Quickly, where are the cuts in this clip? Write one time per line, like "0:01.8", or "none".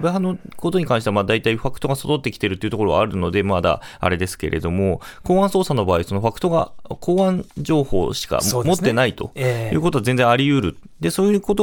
0:07.5

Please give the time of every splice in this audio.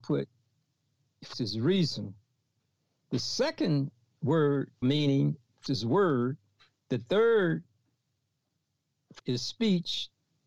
0:01.3
0:04.8
0:05.7
0:09.2

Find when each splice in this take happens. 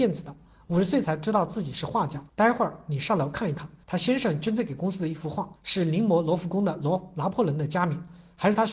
0:02.3
0:03.8
0:05.6

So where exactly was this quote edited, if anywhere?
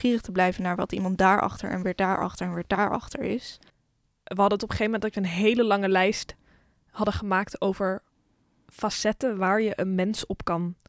none

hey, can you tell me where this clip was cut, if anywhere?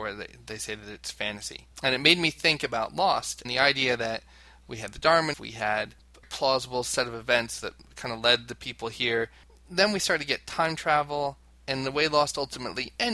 0:01.7
0:03.4
0:05.3
0:06.2

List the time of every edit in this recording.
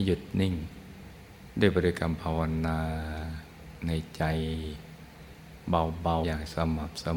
0:06.2

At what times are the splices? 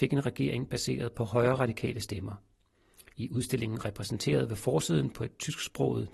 none

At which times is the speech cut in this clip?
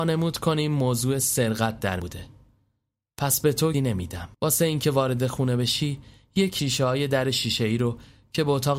0:02.0
0:03.7
0:04.3
0:06.6

